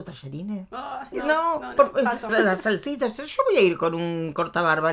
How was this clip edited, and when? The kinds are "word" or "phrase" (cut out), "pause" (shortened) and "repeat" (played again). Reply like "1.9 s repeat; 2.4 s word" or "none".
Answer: 1.1 s word; 2.3 s word